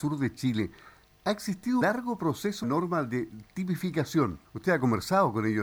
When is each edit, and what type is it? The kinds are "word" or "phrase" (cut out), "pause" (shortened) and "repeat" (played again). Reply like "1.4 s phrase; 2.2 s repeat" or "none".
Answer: 1.8 s word; 2.6 s phrase; 4.5 s pause

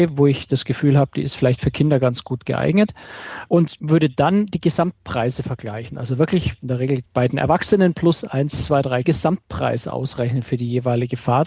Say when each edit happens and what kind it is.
7.1 s pause; 9.0 s phrase

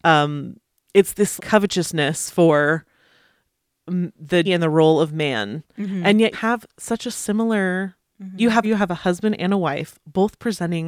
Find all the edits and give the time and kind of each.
1.4 s word; 4.5 s word; 6.3 s word; 8.6 s word

